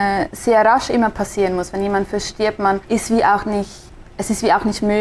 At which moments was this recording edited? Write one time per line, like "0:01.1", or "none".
0:02.8
0:04.1